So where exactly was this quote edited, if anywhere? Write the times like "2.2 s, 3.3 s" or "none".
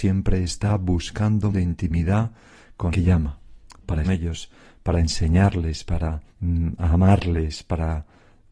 1.5 s, 2.9 s, 4.0 s, 6.3 s